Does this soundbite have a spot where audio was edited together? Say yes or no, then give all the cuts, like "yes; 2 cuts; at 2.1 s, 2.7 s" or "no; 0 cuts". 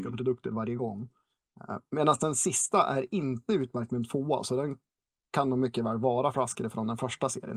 no; 0 cuts